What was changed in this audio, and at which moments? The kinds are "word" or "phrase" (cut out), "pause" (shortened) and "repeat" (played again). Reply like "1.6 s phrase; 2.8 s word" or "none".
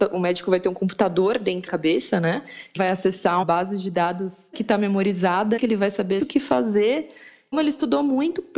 1.7 s word; 2.8 s word; 3.4 s word; 4.5 s word; 5.6 s word; 6.2 s word; 7.5 s word